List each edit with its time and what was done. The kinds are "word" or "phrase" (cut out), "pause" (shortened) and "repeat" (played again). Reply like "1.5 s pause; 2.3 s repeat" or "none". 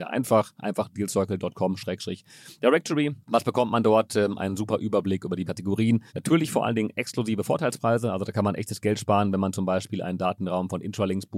3.2 s pause; 5.5 s phrase; 6.1 s pause